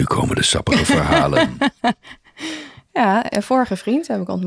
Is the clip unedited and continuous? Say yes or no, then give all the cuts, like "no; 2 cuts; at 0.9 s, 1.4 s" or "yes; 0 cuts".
yes; 0 cuts